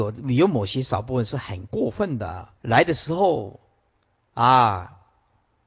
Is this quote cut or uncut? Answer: cut